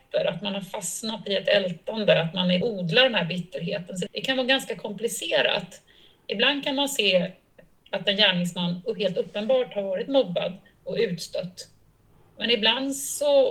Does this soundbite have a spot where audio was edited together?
yes; 2 cuts; at 2.6 s, 4.1 s

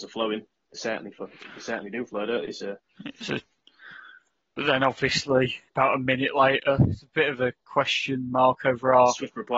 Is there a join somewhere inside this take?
yes; 1 cut; at 5.7 s

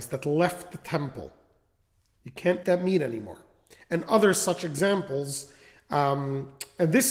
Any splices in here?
yes; 1 cut; at 2.6 s

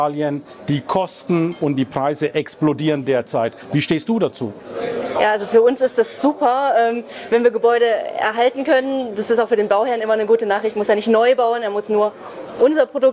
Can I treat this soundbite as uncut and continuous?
yes; 0 cuts

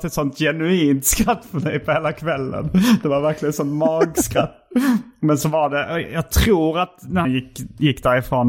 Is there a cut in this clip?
yes; 1 cut; at 7.2 s

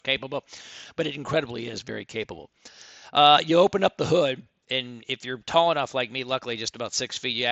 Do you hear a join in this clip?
no; 0 cuts

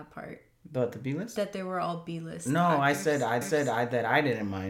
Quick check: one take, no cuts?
no; 1 cut; at 3.4 s

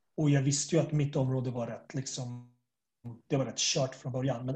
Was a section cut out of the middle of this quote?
no; 0 cuts

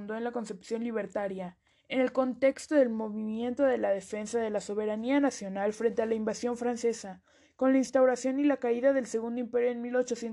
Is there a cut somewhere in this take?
no; 0 cuts

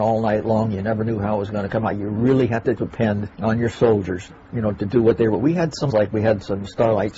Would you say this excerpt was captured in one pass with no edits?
no; 3 cuts; at 3.3 s, 4.4 s, 5.9 s

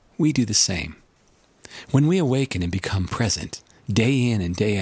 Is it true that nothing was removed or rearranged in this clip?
no; 1 cut; at 3.1 s

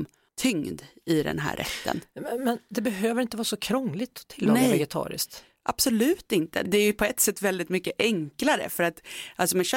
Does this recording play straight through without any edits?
yes; 0 cuts

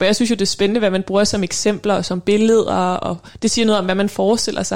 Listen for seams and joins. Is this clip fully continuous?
yes; 0 cuts

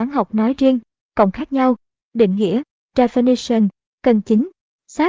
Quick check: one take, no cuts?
yes; 0 cuts

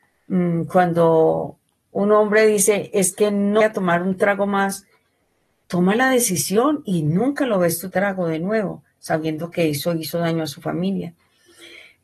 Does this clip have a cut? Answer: yes; 2 cuts; at 3.6 s, 7.9 s

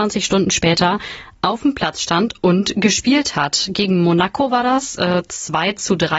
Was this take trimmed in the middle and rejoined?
no; 0 cuts

